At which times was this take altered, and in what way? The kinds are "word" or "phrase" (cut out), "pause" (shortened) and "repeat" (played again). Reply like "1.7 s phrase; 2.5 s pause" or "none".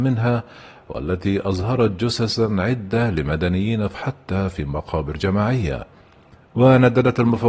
3.9 s phrase